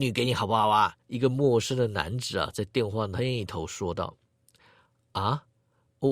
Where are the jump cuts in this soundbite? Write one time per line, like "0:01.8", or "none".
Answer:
0:01.0